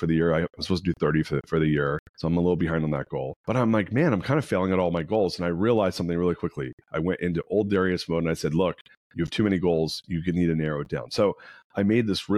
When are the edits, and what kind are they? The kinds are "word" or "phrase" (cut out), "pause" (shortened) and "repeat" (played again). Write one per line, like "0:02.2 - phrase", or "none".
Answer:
0:02.1 - pause
0:03.4 - pause